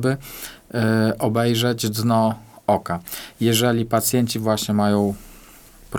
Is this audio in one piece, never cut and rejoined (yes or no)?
yes